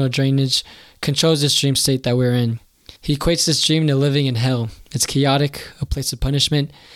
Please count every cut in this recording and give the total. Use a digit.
1